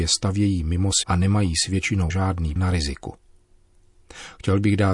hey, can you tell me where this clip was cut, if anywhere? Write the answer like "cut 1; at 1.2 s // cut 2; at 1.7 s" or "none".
cut 1; at 1.0 s // cut 2; at 2.1 s // cut 3; at 2.6 s